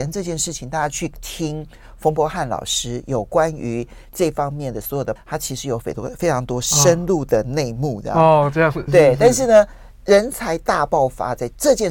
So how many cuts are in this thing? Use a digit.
2